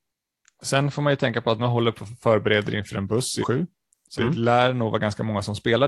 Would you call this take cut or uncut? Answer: cut